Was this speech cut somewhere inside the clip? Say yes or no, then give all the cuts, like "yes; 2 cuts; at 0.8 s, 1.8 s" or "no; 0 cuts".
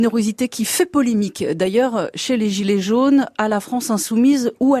no; 0 cuts